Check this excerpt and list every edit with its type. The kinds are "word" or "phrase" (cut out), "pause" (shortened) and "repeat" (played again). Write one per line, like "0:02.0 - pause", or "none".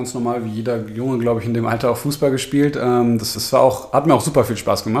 0:03.3 - repeat